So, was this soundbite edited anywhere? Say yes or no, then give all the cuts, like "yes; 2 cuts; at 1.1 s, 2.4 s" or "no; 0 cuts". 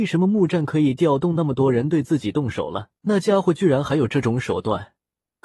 yes; 1 cut; at 3.0 s